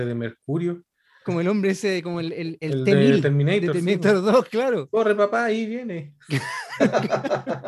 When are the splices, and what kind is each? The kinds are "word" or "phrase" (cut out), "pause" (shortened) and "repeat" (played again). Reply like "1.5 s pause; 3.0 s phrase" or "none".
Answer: none